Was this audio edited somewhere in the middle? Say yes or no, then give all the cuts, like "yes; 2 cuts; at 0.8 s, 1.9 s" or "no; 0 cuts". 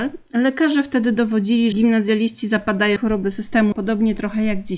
yes; 3 cuts; at 1.7 s, 3.0 s, 3.7 s